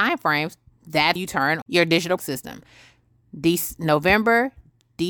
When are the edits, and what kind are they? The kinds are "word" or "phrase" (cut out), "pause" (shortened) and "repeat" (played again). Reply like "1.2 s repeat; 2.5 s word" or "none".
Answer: 1.2 s word; 1.6 s word; 2.2 s word